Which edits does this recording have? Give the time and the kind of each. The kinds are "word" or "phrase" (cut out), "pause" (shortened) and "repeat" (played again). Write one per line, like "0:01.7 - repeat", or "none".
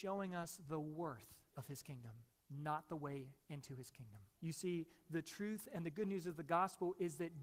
0:01.5 - pause
0:02.3 - pause
0:03.4 - pause
0:04.3 - pause

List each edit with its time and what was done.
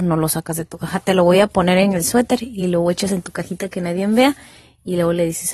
none

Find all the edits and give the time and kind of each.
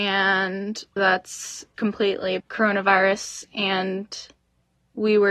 0:01.0 - word
0:01.8 - word
0:02.4 - word

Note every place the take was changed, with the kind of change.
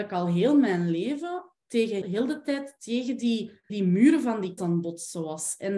0:02.0 - word
0:03.7 - word
0:04.6 - word

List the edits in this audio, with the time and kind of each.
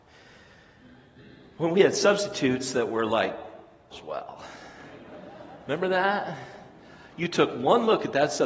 0:03.9 - word

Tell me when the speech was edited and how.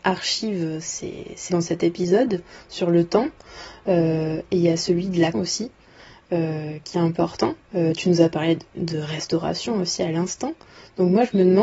0:01.5 - word
0:05.3 - word
0:07.6 - pause

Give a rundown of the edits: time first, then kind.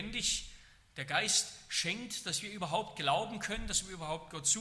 none

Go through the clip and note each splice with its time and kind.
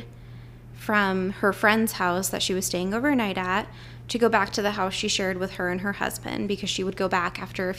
none

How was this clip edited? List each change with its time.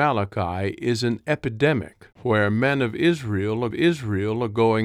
0:02.1 - pause
0:03.7 - repeat

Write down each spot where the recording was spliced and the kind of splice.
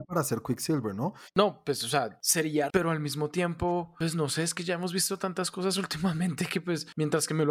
0:02.7 - word

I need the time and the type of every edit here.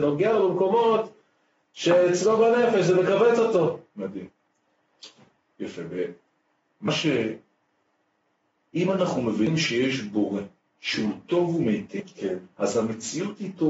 none

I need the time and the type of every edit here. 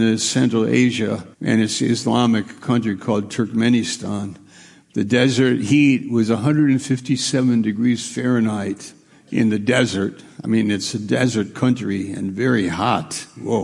0:01.3 - pause
0:09.1 - pause

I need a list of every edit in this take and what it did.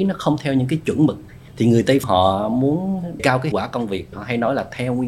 0:01.5 - pause
0:02.0 - word
0:03.2 - word
0:03.5 - word
0:04.1 - word

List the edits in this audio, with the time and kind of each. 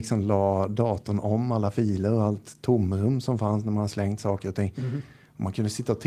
none

